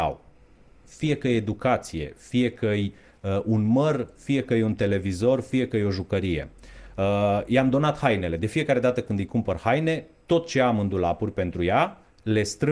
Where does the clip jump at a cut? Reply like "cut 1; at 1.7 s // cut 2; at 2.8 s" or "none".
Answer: none